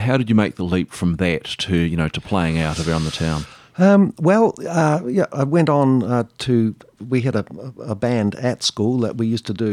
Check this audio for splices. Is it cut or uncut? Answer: uncut